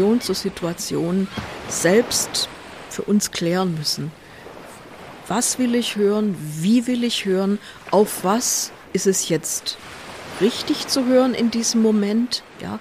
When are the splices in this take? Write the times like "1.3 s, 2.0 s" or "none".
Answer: 8.8 s

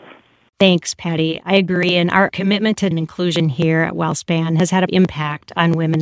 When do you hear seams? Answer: 2.9 s, 4.9 s

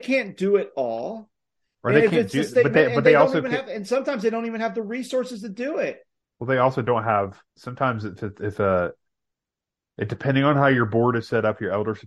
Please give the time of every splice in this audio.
6.2 s, 7.5 s

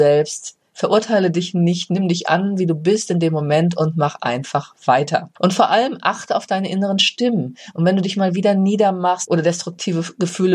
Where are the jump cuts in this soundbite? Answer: 5.4 s

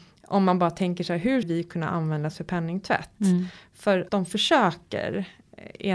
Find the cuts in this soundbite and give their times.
1.4 s, 4.1 s

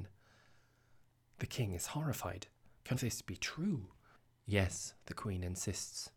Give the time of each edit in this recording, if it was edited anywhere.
2.9 s

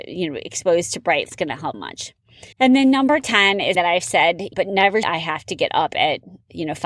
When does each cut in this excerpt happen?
1.3 s, 1.7 s, 2.5 s, 3.7 s, 4.5 s, 5.0 s

